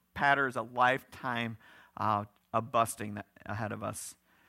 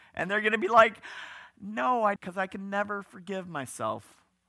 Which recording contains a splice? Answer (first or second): second